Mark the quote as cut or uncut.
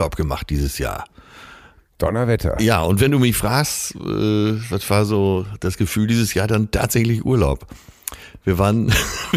uncut